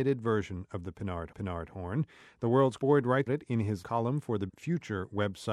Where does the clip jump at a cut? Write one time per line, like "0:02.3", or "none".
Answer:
0:01.3
0:02.8
0:03.3
0:03.8
0:04.5